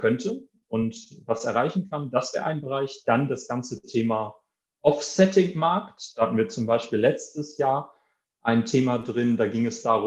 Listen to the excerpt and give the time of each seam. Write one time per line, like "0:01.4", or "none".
none